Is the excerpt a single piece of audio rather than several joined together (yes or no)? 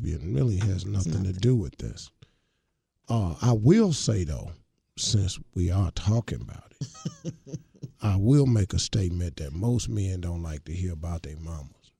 yes